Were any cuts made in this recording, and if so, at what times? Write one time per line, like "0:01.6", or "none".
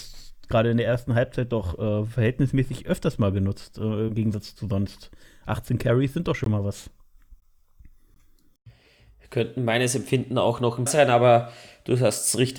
0:10.9